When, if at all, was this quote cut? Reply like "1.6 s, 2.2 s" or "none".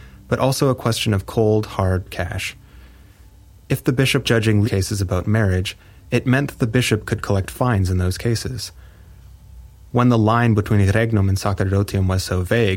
4.2 s, 4.6 s